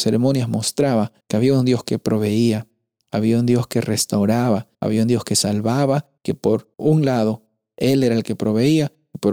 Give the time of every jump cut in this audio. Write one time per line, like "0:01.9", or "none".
0:01.2
0:04.7
0:06.2
0:06.7